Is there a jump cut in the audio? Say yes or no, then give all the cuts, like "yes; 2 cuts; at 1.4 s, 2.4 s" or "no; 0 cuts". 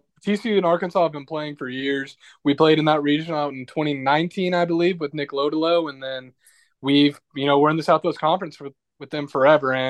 no; 0 cuts